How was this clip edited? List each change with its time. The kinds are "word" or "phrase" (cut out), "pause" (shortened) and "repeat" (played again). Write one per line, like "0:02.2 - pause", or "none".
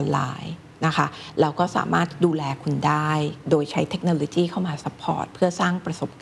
none

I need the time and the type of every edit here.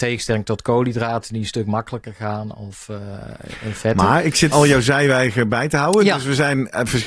0:04.5 - word

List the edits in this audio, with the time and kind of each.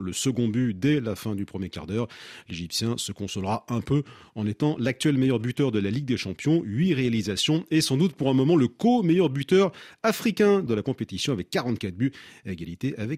0:10.7 - word

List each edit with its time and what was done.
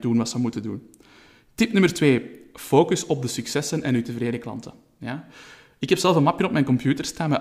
none

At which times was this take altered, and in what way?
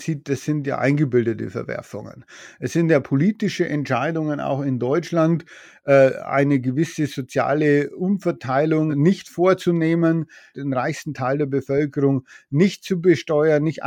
none

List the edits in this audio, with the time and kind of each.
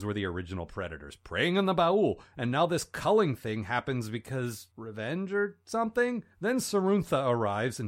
0:04.7 - pause
0:06.3 - pause

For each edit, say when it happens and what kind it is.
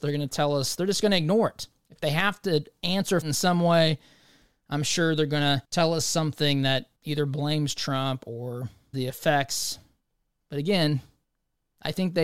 0:03.2 - word
0:05.6 - pause
0:07.0 - pause
0:08.9 - word

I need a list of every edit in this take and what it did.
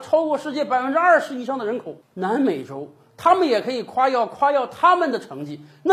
0:02.0 - pause

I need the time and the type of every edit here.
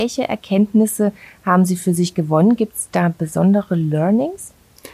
none

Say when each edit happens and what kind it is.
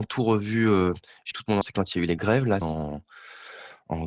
0:01.3 - word
0:01.6 - word
0:02.2 - word
0:02.6 - word

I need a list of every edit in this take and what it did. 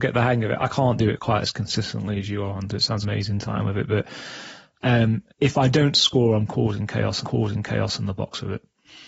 0:03.0 - phrase
0:05.3 - pause
0:07.2 - repeat

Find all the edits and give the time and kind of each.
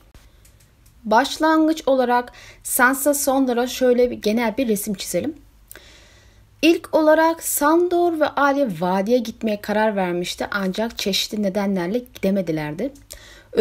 none

